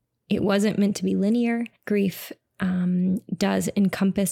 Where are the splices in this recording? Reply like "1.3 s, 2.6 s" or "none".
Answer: 1.8 s